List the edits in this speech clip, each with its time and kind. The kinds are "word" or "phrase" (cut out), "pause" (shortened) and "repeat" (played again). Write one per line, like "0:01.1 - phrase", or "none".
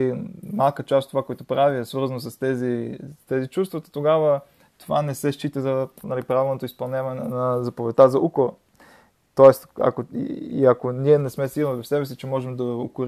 none